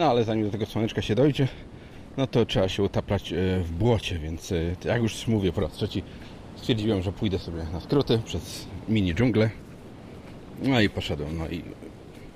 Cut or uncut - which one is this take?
uncut